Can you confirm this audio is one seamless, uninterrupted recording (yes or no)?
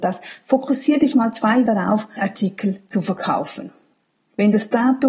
no